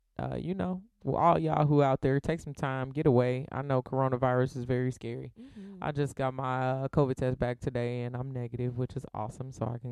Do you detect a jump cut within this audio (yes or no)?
yes